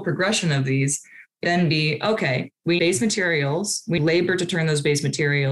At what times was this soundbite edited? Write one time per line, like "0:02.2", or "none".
0:01.4
0:02.8
0:04.0